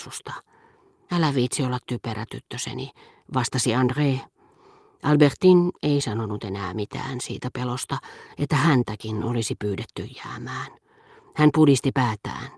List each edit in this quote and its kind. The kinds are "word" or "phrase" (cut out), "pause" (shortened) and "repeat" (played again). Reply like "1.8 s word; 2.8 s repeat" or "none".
none